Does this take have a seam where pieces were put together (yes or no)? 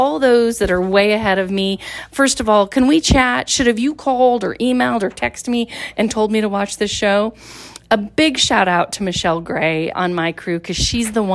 yes